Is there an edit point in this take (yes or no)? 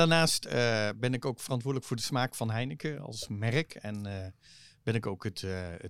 no